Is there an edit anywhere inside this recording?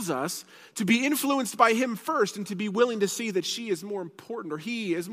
no; 0 cuts

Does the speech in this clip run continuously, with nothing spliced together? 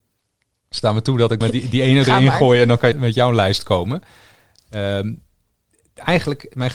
no; 2 cuts; at 1.4 s, 2.9 s

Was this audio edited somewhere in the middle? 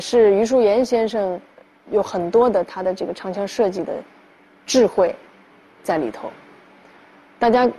no; 0 cuts

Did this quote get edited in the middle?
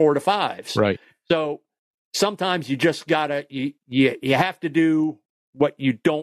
no; 0 cuts

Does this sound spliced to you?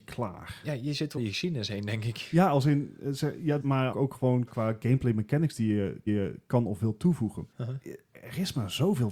yes; 6 cuts; at 1.2 s, 3.6 s, 3.9 s, 4.5 s, 6.1 s, 7.5 s

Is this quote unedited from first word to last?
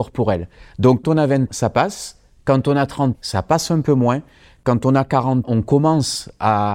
no; 4 cuts; at 1.0 s, 1.5 s, 3.1 s, 5.4 s

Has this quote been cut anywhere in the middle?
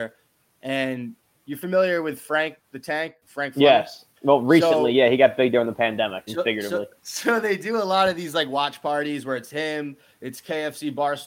yes; 3 cuts; at 4.1 s, 6.3 s, 7.0 s

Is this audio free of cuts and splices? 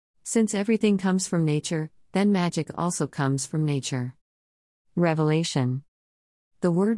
yes; 0 cuts

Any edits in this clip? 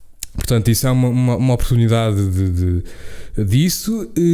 no; 0 cuts

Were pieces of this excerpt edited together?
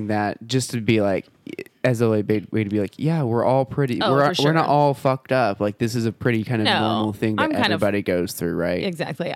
no; 0 cuts

